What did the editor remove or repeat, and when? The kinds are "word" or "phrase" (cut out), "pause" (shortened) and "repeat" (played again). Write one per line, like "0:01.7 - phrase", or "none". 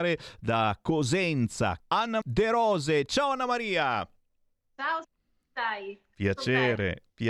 0:01.8 - word
0:02.2 - word
0:05.0 - word